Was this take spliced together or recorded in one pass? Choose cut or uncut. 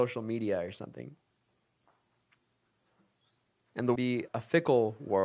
cut